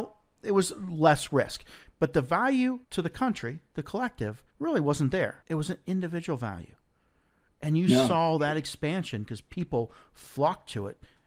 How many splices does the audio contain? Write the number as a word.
three